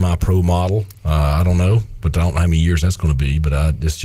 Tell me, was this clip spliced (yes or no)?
no